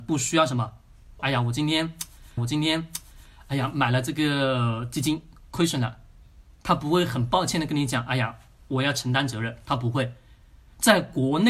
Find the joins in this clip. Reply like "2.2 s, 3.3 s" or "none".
1.2 s, 2.4 s